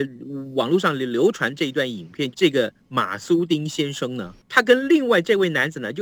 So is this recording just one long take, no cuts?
no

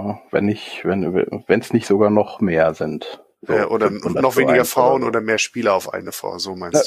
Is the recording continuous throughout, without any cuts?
yes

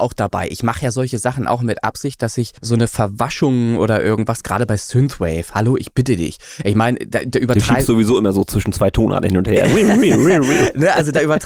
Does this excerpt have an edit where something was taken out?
yes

